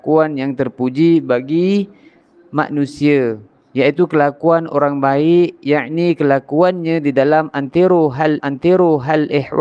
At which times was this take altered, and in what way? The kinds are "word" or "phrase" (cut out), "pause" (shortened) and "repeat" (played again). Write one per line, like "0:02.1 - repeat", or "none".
0:08.4 - repeat